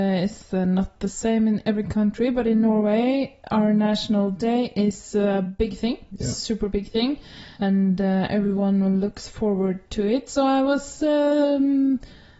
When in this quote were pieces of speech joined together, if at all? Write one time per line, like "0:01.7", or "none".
0:06.1
0:07.5

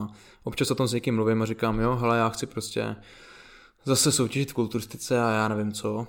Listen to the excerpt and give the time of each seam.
none

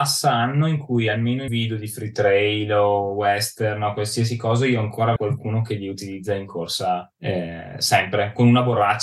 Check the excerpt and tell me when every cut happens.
0:01.5
0:05.2
0:07.1

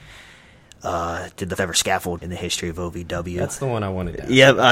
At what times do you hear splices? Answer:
0:01.6
0:02.2

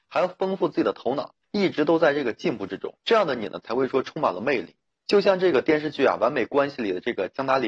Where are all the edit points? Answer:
0:01.4
0:03.0
0:04.9

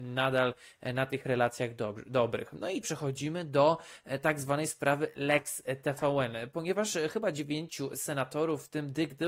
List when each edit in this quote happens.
0:02.8

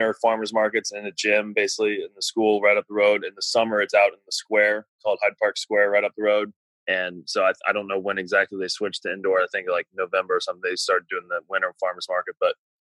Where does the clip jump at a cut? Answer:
none

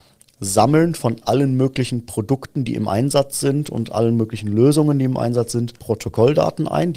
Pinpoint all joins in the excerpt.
0:05.8

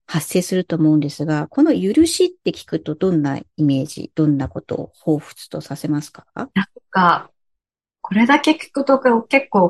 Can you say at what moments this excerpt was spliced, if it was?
0:06.5

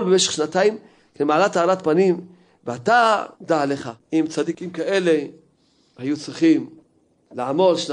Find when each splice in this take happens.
0:03.3
0:04.0

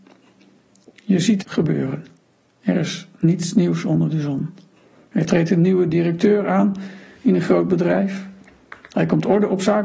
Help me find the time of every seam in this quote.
0:01.4

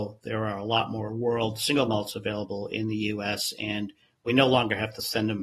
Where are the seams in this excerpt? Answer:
none

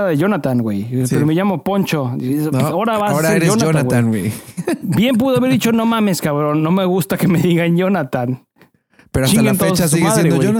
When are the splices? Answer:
none

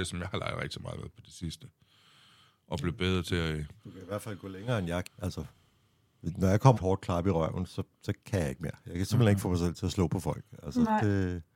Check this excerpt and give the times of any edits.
0:03.8
0:05.0
0:06.7
0:07.9

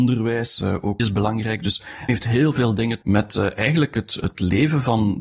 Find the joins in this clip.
0:01.0
0:02.1
0:03.0

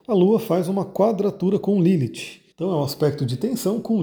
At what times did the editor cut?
0:02.5

